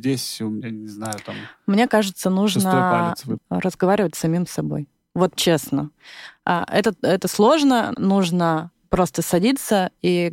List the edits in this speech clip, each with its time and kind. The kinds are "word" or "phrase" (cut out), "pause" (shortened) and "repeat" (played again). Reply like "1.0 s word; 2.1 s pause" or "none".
3.4 s word; 5.4 s word; 7.9 s word